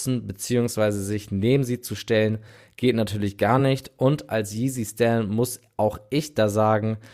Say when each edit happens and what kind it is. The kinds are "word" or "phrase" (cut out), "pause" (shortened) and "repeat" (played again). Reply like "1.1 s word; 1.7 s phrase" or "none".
none